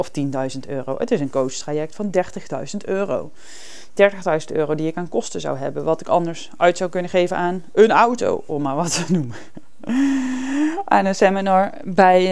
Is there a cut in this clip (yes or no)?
no